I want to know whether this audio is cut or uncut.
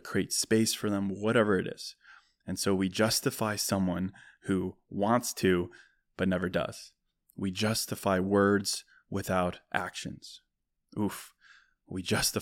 uncut